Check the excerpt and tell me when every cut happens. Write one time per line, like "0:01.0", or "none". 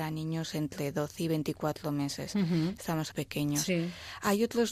0:03.1